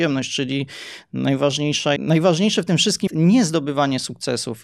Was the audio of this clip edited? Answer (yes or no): yes